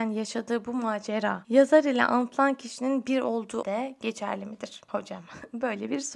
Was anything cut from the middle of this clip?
yes; 1 cut; at 3.6 s

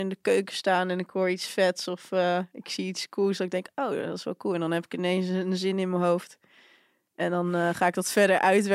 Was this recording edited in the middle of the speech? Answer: no; 0 cuts

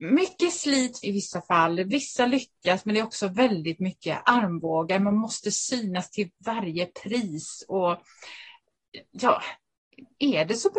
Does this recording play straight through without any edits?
no; 1 cut; at 1.0 s

